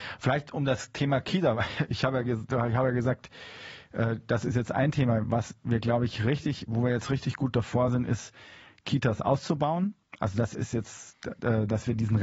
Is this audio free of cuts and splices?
yes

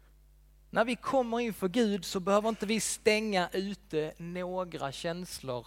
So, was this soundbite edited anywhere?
no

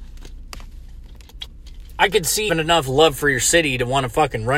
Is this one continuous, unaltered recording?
no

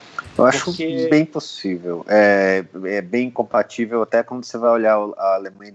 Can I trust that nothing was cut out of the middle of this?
yes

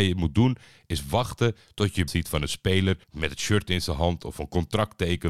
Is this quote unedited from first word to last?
no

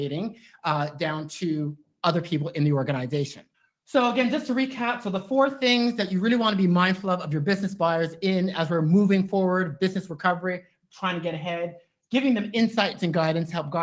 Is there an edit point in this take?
yes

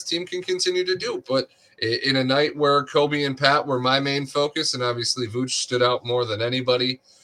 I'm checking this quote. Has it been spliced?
no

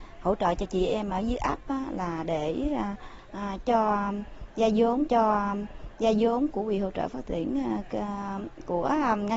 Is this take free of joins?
no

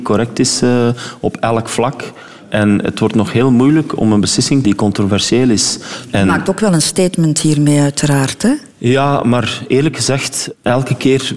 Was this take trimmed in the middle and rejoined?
yes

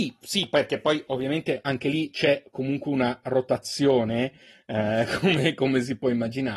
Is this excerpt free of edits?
yes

